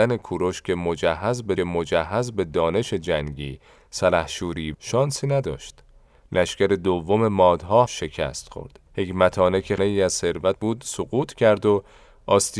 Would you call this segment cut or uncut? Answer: cut